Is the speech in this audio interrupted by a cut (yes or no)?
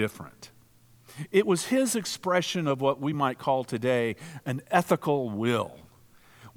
no